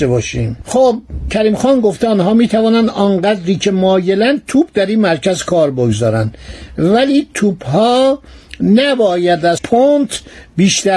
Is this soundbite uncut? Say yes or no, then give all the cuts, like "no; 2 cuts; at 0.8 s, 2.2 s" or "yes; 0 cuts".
no; 1 cut; at 9.6 s